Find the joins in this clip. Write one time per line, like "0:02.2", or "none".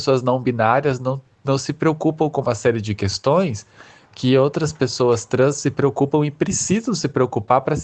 none